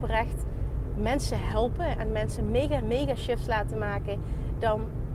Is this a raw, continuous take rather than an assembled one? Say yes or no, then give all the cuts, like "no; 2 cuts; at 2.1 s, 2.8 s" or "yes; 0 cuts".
no; 1 cut; at 2.8 s